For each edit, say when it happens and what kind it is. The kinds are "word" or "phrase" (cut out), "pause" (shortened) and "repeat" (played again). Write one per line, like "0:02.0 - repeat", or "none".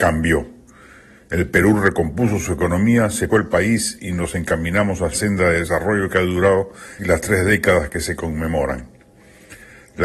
0:03.3 - word
0:05.1 - word
0:07.0 - word